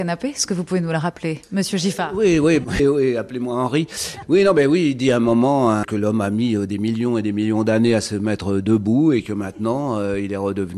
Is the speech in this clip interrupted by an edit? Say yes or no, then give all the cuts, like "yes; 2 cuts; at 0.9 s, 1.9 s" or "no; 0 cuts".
yes; 2 cuts; at 2.8 s, 5.8 s